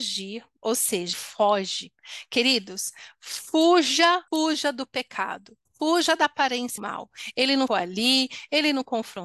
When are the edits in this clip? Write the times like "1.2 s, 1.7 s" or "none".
1.1 s, 4.3 s, 5.7 s, 6.8 s, 7.7 s

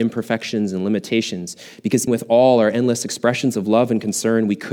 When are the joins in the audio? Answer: 2.1 s

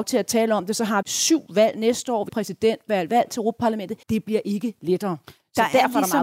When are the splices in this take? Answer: 1.0 s, 2.3 s, 4.0 s

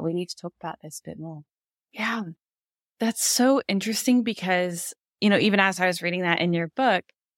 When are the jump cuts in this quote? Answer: none

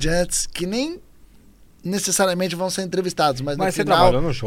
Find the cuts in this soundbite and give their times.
none

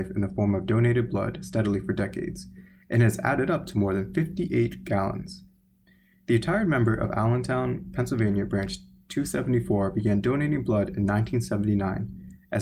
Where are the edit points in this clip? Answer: none

